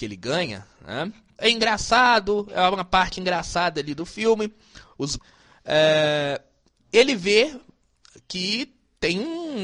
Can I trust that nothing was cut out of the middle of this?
no; 2 cuts; at 1.4 s, 5.2 s

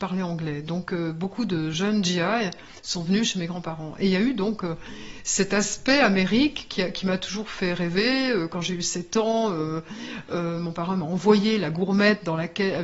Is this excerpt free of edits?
yes; 0 cuts

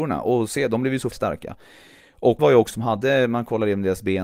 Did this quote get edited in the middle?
yes; 3 cuts; at 1.1 s, 2.4 s, 2.7 s

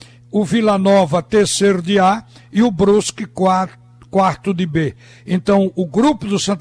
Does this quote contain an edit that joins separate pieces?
no; 0 cuts

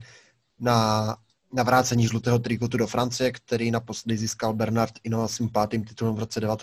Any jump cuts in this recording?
no; 0 cuts

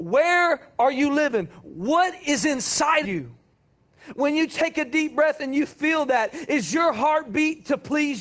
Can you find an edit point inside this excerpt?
yes; 1 cut; at 3.0 s

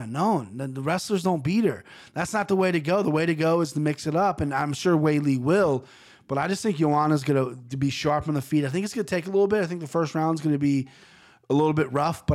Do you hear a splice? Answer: no; 0 cuts

